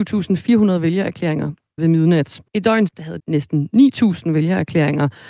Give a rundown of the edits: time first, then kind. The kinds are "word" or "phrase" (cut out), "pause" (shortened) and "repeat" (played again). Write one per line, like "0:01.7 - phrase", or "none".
0:01.8 - word
0:02.5 - pause
0:02.9 - word
0:03.2 - word